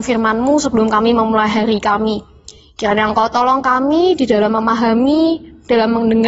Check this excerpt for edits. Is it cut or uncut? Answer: uncut